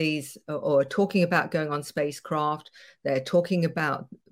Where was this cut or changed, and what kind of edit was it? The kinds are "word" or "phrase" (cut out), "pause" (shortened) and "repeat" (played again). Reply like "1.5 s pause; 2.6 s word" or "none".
none